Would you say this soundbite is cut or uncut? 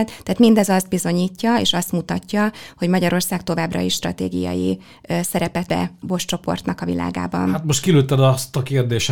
cut